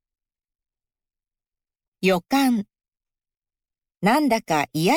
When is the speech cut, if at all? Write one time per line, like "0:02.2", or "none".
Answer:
none

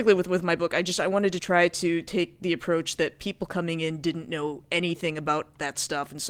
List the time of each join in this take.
none

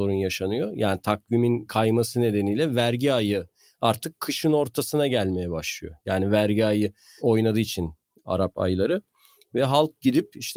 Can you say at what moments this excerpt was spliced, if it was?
none

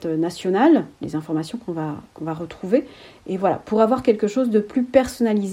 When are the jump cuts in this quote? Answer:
none

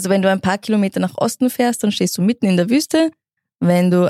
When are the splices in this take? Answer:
none

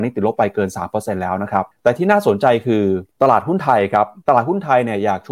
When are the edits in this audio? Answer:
0:01.7
0:03.1
0:04.2

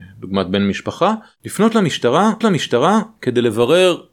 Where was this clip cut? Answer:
0:02.4

